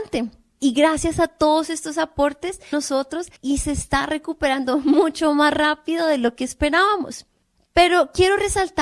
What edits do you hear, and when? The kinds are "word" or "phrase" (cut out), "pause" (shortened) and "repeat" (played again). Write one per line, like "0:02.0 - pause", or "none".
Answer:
0:02.7 - phrase
0:03.4 - pause